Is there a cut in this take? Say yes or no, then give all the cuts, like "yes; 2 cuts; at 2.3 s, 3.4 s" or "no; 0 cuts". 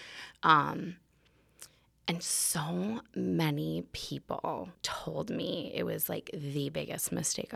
yes; 1 cut; at 4.7 s